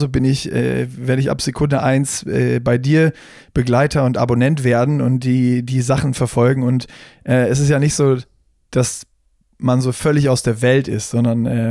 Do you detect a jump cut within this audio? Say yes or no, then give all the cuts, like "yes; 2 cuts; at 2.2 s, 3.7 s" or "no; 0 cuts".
no; 0 cuts